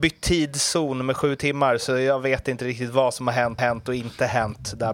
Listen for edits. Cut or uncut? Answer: cut